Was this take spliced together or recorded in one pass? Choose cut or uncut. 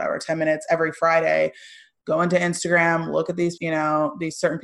cut